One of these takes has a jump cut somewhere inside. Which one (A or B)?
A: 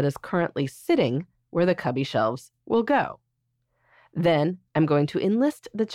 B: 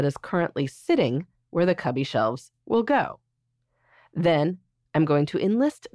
A